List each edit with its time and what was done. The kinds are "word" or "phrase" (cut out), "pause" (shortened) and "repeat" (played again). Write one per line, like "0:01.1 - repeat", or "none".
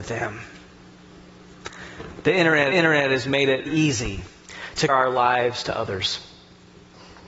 0:02.7 - repeat
0:03.7 - word
0:04.9 - word